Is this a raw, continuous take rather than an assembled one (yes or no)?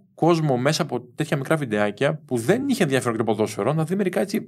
yes